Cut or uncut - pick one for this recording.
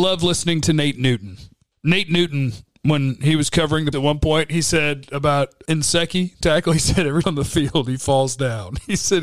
cut